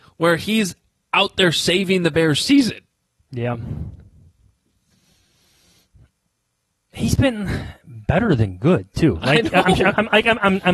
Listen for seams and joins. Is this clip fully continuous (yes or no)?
no